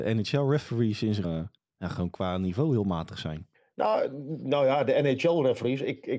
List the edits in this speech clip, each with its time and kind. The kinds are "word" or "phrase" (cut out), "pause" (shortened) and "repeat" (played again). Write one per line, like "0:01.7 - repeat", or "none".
0:01.2 - word
0:01.6 - pause
0:03.5 - pause